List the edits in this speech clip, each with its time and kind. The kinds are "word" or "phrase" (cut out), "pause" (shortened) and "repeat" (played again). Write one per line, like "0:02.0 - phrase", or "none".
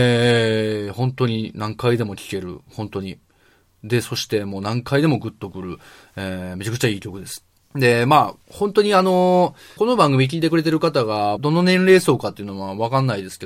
0:07.5 - pause
0:08.4 - pause
0:09.8 - phrase
0:11.4 - phrase